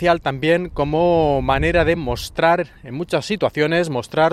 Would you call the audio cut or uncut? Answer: uncut